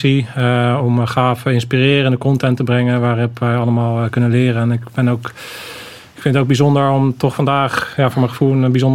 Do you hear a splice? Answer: no; 0 cuts

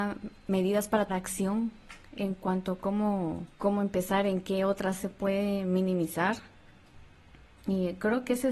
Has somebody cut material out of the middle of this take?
yes; 3 cuts; at 1.1 s, 3.5 s, 5.0 s

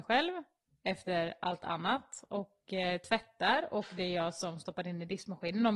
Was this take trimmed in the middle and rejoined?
no; 0 cuts

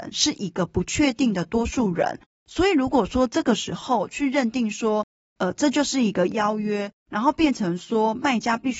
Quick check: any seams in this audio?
no; 0 cuts

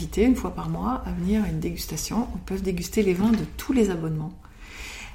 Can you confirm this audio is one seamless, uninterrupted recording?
yes; 0 cuts

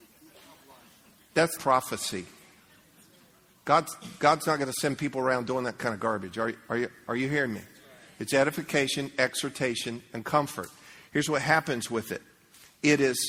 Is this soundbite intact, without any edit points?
no; 1 cut; at 1.6 s

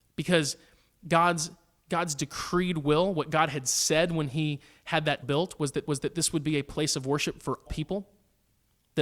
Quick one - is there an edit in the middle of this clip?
yes; 3 cuts; at 5.2 s, 5.8 s, 7.7 s

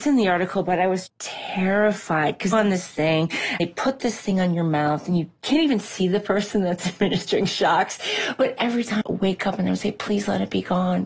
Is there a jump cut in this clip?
yes; 4 cuts; at 1.1 s, 2.5 s, 3.6 s, 9.0 s

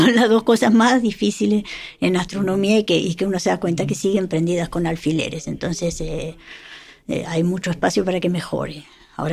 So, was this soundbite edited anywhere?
no; 0 cuts

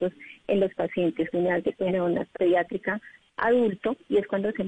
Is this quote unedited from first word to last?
no; 3 cuts; at 1.3 s, 1.9 s, 2.3 s

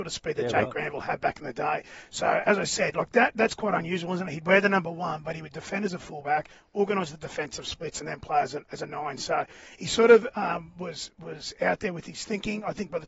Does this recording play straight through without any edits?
yes; 0 cuts

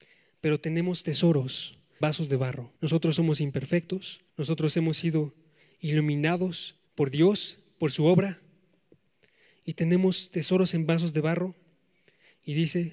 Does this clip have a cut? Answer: yes; 4 cuts; at 2.0 s, 2.8 s, 4.3 s, 6.9 s

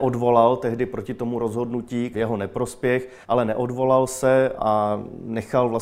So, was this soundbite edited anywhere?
yes; 3 cuts; at 2.1 s, 3.2 s, 4.6 s

